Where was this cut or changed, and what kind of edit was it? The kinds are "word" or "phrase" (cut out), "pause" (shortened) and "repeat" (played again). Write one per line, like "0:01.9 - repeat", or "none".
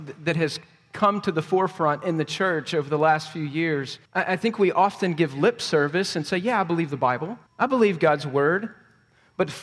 0:04.1 - pause
0:07.5 - pause